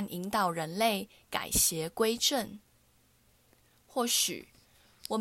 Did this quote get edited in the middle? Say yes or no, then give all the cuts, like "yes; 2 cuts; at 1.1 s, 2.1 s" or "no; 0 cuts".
no; 0 cuts